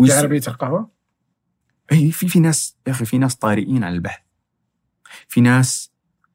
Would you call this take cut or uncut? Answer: uncut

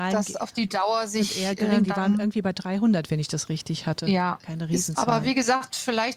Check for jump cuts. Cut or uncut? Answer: uncut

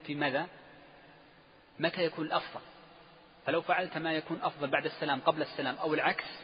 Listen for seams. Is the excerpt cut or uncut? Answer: uncut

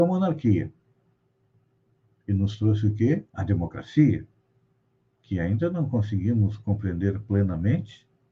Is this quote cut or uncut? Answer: cut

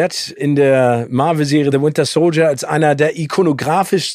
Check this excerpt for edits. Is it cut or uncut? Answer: cut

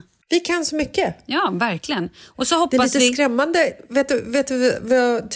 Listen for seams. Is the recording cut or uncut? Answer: uncut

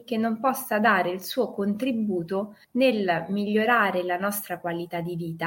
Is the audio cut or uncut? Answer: cut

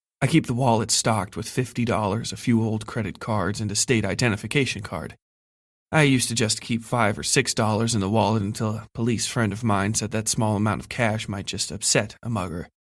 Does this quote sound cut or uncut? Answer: uncut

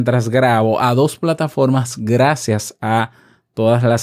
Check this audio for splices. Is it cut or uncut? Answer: uncut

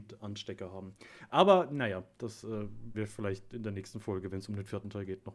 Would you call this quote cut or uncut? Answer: cut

